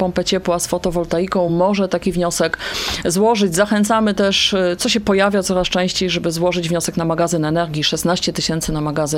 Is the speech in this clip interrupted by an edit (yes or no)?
no